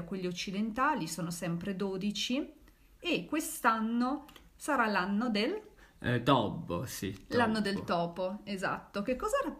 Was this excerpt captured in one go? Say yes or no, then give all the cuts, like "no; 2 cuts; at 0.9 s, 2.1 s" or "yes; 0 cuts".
yes; 0 cuts